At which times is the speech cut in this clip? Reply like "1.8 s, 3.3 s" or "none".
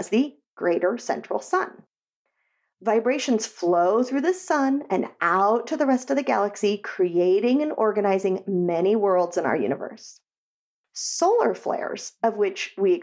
none